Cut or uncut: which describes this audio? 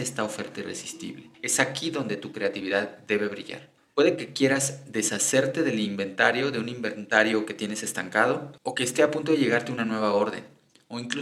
cut